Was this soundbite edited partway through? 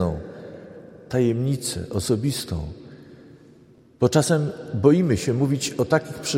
no; 0 cuts

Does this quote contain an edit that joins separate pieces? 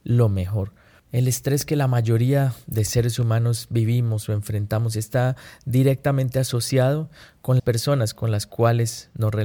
yes; 1 cut; at 7.6 s

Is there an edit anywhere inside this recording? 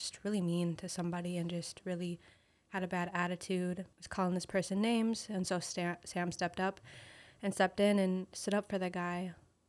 yes; 1 cut; at 3.9 s

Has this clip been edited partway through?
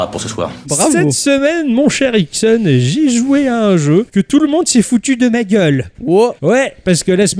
no; 0 cuts

